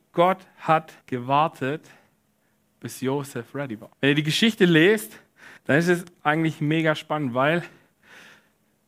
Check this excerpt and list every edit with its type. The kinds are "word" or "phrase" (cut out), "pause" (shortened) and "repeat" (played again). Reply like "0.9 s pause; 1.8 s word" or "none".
1.0 s pause; 3.9 s pause; 5.6 s pause